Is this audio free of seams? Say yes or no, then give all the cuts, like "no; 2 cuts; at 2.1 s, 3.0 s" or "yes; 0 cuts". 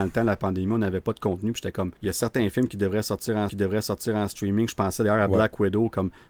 no; 2 cuts; at 2.0 s, 3.5 s